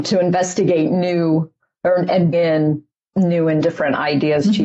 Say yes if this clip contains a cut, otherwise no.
yes